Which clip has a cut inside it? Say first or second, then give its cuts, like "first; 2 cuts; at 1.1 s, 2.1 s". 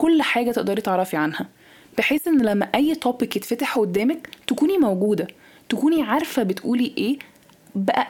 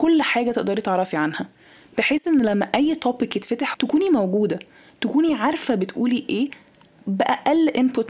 second; 1 cut; at 3.7 s